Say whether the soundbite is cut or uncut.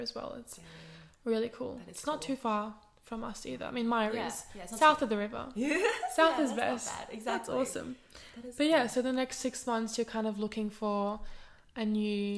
uncut